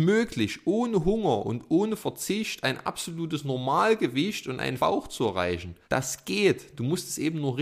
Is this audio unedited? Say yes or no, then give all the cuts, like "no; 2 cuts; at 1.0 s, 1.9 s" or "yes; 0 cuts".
no; 2 cuts; at 4.8 s, 5.8 s